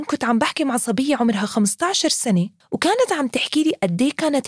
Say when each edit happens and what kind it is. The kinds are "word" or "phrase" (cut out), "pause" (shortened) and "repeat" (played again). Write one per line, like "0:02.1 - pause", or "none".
0:02.6 - pause